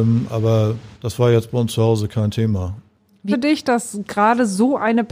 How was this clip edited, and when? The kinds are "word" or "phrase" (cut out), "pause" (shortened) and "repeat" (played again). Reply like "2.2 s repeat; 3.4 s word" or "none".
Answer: 0.9 s pause; 3.3 s phrase